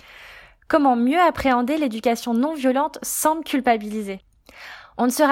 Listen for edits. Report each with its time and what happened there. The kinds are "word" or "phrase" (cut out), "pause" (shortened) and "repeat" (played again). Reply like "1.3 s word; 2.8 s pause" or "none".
none